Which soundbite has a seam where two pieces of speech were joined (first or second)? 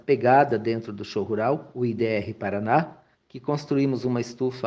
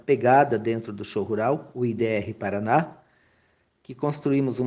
first